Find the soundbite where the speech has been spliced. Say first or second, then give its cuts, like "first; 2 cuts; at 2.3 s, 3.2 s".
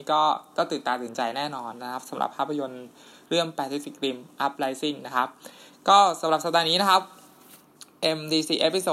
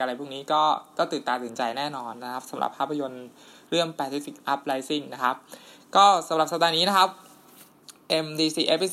second; 1 cut; at 4.4 s